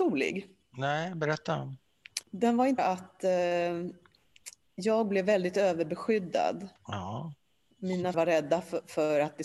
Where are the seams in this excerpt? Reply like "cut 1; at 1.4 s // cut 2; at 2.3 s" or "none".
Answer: cut 1; at 2.2 s // cut 2; at 2.8 s // cut 3; at 4.6 s // cut 4; at 6.8 s // cut 5; at 8.1 s